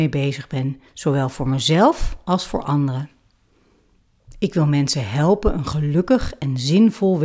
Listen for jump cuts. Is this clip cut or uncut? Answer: uncut